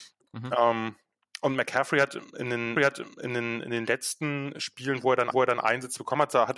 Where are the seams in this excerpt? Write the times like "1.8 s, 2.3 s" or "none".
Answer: 2.8 s, 5.3 s